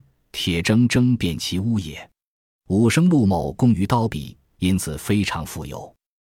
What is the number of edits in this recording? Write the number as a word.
zero